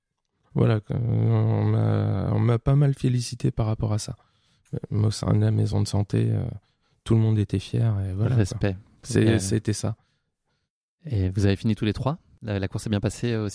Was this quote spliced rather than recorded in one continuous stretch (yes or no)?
no